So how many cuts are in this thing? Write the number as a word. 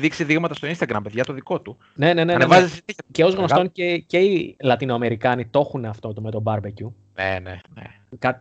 zero